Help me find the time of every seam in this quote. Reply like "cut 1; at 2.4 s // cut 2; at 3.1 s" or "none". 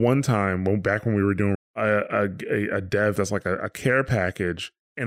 cut 1; at 1.5 s // cut 2; at 3.2 s